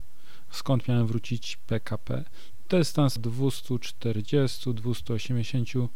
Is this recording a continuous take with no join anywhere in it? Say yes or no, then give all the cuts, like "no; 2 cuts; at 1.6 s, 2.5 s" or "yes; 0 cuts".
no; 1 cut; at 3.2 s